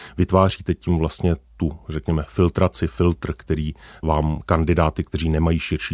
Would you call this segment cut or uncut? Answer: uncut